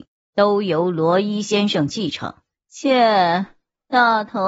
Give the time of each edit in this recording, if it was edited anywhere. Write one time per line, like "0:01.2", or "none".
0:02.5